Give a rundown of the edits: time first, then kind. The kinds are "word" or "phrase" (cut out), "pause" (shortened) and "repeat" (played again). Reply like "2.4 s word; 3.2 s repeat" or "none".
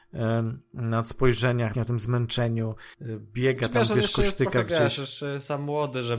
1.7 s phrase; 2.9 s pause

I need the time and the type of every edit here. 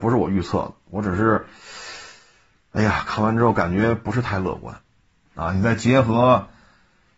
none

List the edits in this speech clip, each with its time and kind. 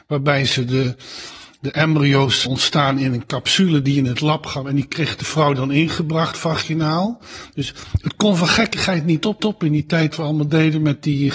2.5 s word; 9.4 s repeat; 10.1 s word

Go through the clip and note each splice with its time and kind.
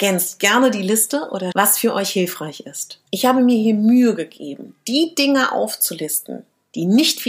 1.5 s word; 3.1 s pause

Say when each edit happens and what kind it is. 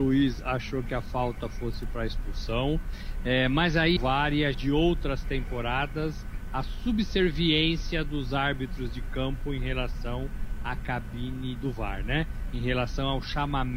4.0 s phrase; 4.5 s phrase; 11.6 s word

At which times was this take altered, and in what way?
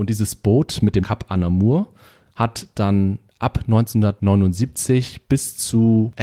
1.0 s word

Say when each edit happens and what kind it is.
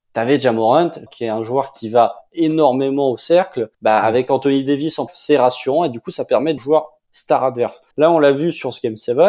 1.1 s word; 3.7 s pause; 5.1 s phrase; 6.6 s phrase; 7.9 s pause

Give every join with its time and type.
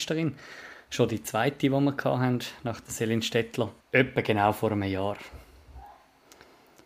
3.8 s pause

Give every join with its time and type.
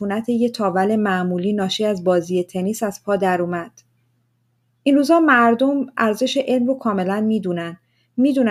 none

